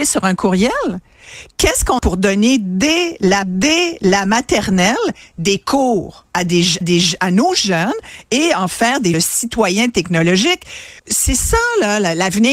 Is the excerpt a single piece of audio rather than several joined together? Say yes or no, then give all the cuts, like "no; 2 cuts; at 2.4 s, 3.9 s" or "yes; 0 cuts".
no; 6 cuts; at 2.0 s, 3.4 s, 6.3 s, 6.8 s, 9.1 s, 11.0 s